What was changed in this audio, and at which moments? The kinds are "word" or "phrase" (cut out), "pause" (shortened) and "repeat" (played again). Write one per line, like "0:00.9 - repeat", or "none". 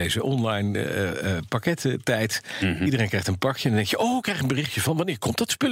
none